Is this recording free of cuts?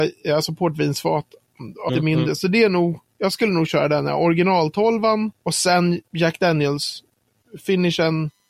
no; 2 cuts; at 1.9 s, 5.4 s

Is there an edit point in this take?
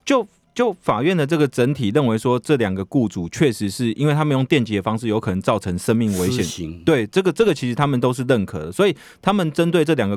no; 0 cuts

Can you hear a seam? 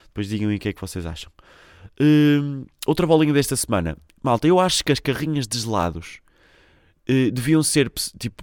no; 0 cuts

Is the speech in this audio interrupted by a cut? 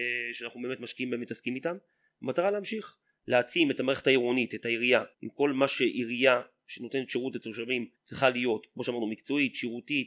yes; 2 cuts; at 5.1 s, 8.0 s

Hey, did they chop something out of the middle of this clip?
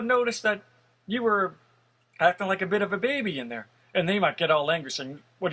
no; 0 cuts

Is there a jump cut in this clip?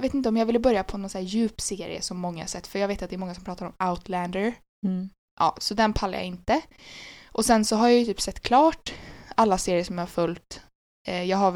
no; 0 cuts

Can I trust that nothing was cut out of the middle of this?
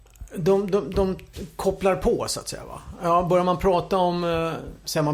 yes; 0 cuts

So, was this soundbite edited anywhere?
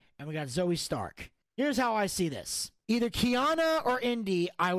no; 0 cuts

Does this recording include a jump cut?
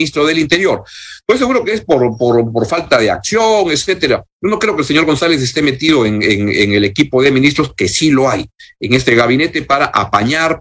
no; 0 cuts

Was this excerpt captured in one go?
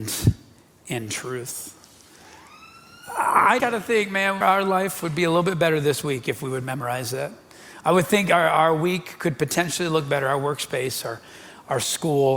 no; 2 cuts; at 3.6 s, 4.4 s

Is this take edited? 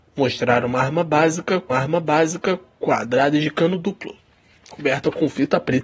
yes; 1 cut; at 1.7 s

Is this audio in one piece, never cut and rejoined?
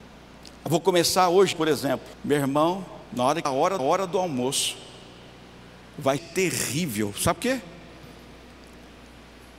no; 7 cuts; at 1.5 s, 2.1 s, 3.0 s, 3.4 s, 3.8 s, 6.2 s, 7.4 s

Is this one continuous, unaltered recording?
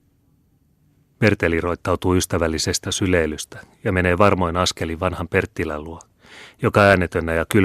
no; 1 cut; at 2.8 s

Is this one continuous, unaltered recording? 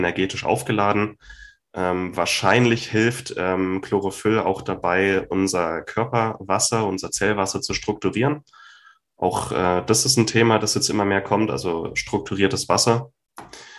yes; 0 cuts

